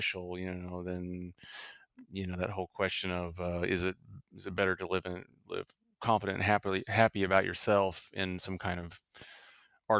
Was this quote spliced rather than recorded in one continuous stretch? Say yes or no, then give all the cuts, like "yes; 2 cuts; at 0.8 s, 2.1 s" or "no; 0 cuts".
no; 0 cuts